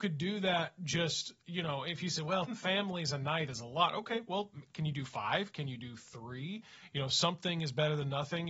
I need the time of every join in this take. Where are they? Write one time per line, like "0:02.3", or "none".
0:02.5